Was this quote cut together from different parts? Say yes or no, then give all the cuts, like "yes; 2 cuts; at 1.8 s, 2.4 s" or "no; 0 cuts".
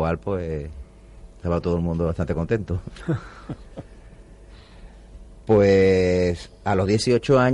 no; 0 cuts